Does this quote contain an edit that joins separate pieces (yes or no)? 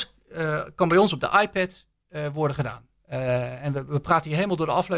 yes